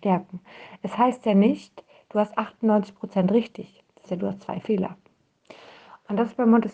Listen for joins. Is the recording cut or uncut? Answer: cut